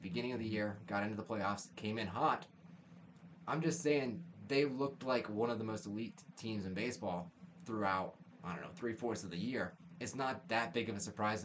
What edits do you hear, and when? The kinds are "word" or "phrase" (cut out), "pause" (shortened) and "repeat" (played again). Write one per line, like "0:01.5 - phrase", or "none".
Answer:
none